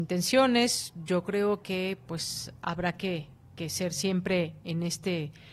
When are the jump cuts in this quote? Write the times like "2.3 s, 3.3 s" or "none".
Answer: none